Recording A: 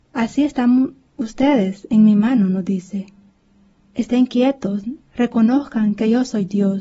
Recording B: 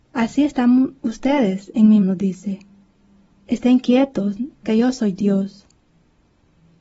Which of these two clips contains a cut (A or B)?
B